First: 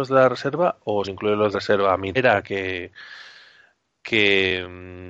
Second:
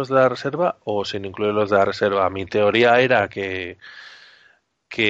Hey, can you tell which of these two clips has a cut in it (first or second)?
first